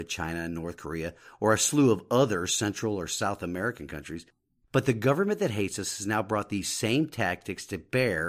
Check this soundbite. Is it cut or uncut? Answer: uncut